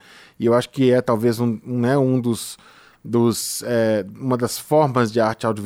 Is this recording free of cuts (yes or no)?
yes